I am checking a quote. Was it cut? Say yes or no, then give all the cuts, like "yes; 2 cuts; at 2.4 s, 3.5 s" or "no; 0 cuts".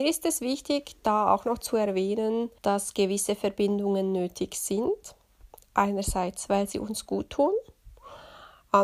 yes; 1 cut; at 2.6 s